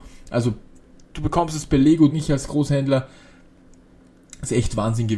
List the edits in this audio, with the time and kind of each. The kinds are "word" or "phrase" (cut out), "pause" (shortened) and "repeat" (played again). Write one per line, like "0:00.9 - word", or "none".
0:02.1 - word